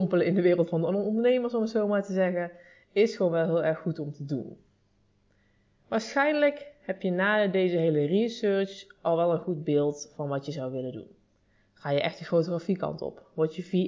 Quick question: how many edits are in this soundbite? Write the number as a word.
zero